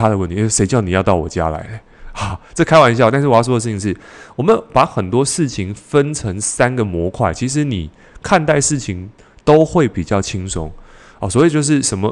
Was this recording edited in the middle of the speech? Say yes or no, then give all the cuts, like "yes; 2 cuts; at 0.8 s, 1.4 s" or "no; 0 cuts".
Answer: no; 0 cuts